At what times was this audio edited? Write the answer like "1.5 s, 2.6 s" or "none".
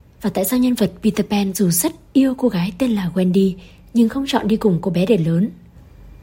none